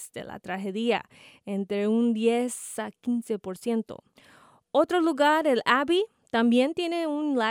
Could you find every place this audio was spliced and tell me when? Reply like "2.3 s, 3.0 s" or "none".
none